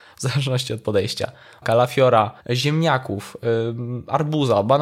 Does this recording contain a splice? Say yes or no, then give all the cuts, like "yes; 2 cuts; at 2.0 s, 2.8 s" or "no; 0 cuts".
yes; 2 cuts; at 1.6 s, 2.4 s